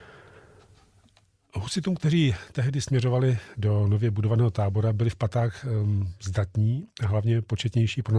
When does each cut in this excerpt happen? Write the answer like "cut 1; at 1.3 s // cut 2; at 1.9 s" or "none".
none